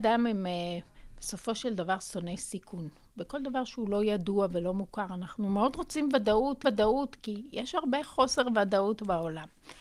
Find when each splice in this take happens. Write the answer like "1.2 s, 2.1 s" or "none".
6.6 s